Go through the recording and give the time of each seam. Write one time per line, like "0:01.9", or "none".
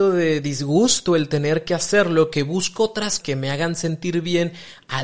0:03.2